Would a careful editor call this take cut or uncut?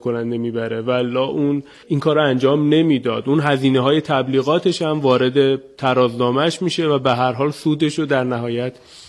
uncut